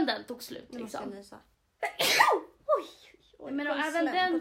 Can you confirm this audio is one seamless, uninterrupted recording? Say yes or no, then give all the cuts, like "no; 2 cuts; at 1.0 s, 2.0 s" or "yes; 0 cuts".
no; 1 cut; at 1.5 s